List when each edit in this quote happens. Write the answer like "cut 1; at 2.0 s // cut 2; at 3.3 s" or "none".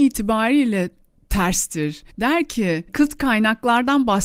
cut 1; at 2.1 s // cut 2; at 2.9 s